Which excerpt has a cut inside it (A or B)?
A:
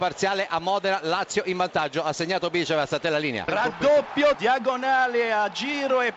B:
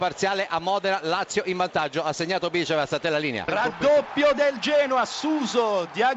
A